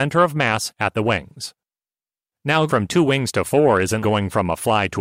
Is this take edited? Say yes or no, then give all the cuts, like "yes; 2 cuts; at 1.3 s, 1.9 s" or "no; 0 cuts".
yes; 2 cuts; at 2.7 s, 4.0 s